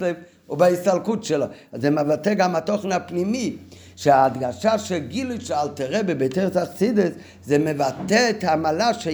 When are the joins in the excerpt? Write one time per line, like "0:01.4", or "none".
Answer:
none